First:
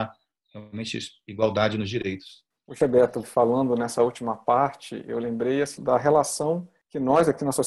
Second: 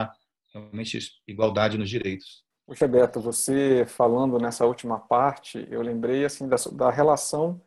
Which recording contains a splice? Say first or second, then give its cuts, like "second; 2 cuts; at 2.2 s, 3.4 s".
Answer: first; 2 cuts; at 3.2 s, 5.8 s